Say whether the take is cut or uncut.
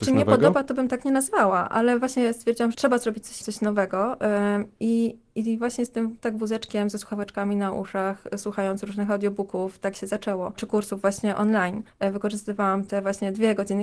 cut